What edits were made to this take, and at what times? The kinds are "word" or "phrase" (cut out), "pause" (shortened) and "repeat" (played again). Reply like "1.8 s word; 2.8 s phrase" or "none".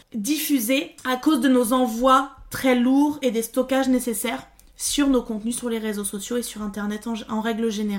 none